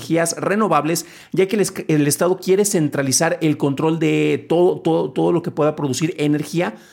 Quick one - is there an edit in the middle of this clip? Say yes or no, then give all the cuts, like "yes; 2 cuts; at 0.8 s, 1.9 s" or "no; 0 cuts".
no; 0 cuts